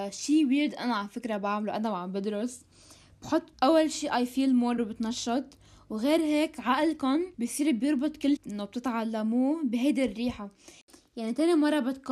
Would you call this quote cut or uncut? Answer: cut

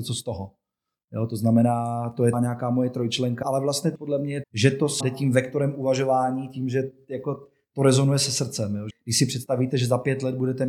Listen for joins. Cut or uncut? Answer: cut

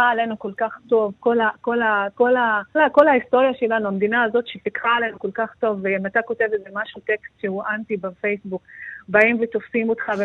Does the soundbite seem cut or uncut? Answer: cut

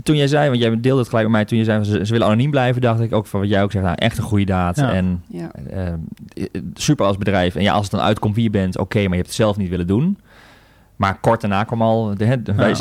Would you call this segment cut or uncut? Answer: uncut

